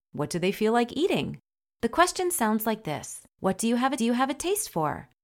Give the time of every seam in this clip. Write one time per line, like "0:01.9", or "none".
0:03.3
0:04.0